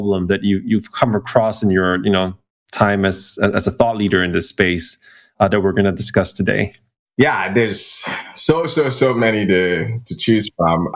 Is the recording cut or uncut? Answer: uncut